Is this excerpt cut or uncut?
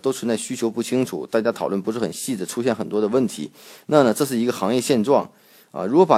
uncut